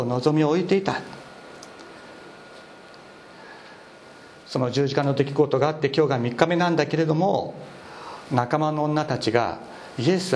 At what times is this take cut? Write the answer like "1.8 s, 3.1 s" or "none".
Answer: 4.4 s